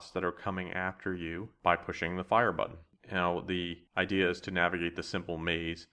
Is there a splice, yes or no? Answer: no